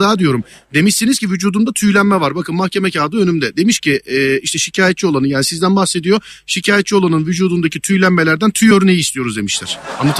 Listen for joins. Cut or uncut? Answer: uncut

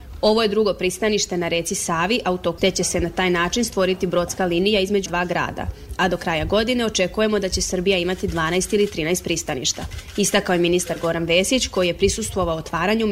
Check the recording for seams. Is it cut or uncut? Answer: cut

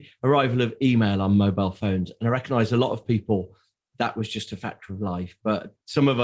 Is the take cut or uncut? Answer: uncut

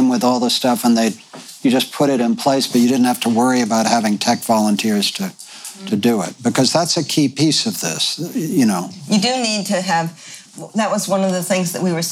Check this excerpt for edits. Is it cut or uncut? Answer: uncut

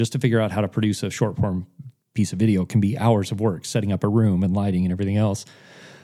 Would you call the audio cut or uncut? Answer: uncut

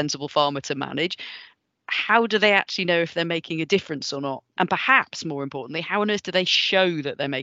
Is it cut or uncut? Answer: uncut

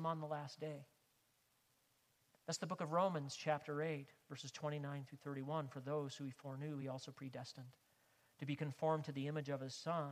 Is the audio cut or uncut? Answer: uncut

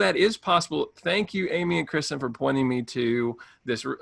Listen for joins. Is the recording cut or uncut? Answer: uncut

